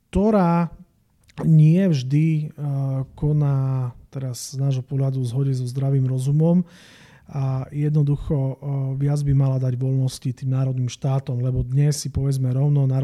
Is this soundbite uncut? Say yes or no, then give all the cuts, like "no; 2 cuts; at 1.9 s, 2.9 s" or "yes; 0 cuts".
yes; 0 cuts